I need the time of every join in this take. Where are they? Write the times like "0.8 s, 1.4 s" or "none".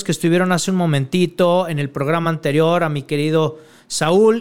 none